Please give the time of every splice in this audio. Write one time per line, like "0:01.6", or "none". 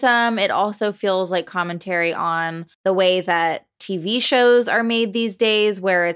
0:02.7